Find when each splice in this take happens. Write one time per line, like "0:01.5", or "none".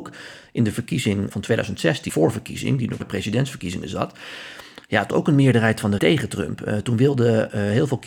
0:01.3
0:02.1
0:03.0
0:05.1
0:06.0